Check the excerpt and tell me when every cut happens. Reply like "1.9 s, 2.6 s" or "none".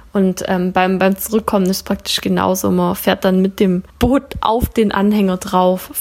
3.9 s